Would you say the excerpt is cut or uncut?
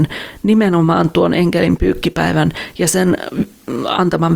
uncut